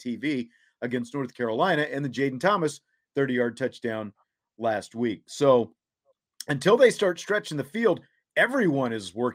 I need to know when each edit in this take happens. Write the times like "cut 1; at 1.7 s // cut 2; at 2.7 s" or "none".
none